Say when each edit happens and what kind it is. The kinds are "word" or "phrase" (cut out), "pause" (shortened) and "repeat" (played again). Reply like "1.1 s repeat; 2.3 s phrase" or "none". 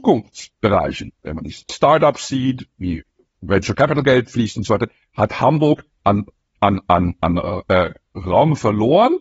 1.7 s word